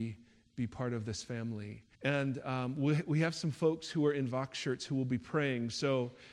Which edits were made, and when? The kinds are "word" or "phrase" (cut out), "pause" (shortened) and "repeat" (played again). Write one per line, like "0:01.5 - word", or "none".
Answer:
0:01.9 - pause